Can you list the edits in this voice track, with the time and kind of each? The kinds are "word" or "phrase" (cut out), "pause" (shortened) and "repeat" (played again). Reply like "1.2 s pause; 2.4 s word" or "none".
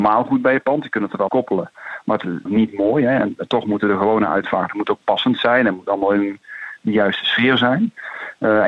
1.3 s word; 2.5 s word